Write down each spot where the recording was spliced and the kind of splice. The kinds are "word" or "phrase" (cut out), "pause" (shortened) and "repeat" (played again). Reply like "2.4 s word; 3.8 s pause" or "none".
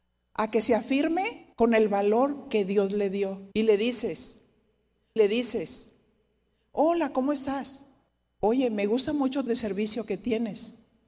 1.5 s pause; 3.5 s pause; 5.2 s repeat; 8.1 s pause; 9.5 s word